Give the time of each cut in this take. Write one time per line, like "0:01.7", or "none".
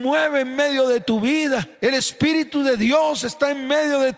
0:01.8